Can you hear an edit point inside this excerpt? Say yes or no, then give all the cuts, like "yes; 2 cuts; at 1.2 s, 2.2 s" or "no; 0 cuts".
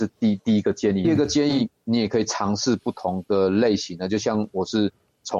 yes; 1 cut; at 1.0 s